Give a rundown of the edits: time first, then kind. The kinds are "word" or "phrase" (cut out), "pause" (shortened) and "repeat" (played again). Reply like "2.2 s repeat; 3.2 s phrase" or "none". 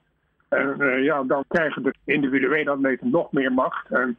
1.4 s word; 1.9 s word